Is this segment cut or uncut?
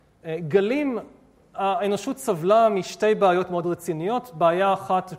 uncut